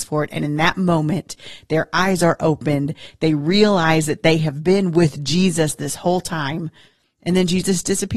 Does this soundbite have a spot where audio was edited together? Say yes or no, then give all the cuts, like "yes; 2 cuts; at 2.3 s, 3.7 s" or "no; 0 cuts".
no; 0 cuts